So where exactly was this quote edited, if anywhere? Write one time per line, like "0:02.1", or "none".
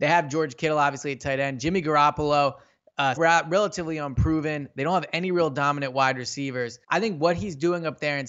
0:03.2
0:06.8